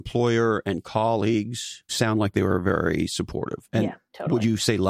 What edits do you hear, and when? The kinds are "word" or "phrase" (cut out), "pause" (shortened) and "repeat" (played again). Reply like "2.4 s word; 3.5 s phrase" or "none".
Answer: 1.9 s word; 3.6 s word